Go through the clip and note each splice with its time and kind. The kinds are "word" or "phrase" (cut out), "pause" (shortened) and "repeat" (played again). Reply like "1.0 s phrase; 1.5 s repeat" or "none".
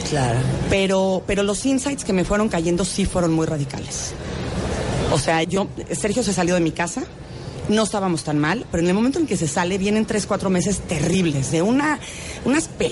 5.4 s word